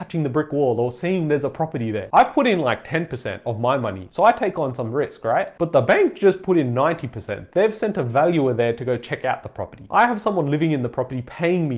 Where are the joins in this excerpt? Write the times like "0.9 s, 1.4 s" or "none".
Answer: none